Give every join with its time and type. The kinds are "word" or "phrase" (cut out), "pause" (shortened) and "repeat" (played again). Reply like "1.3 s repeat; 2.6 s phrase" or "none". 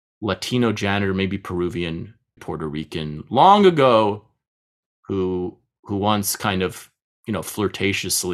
2.4 s word